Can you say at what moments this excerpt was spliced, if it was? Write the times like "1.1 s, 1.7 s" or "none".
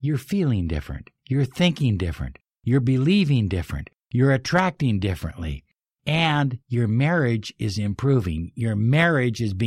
1.2 s, 6.6 s